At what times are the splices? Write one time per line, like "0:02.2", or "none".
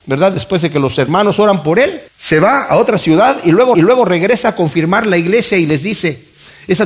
0:02.1
0:03.7